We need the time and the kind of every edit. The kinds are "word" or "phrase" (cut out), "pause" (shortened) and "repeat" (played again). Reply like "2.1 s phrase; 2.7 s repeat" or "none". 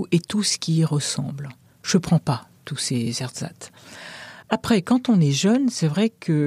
none